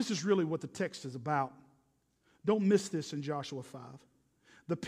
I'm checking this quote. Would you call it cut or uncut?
uncut